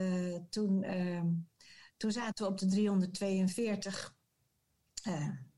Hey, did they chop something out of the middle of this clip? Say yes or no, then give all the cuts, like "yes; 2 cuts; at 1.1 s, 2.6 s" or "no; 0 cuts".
no; 0 cuts